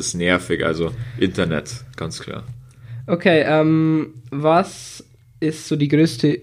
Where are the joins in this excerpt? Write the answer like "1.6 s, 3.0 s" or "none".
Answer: none